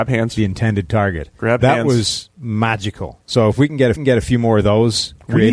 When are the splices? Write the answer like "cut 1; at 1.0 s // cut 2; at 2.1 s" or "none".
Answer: cut 1; at 3.9 s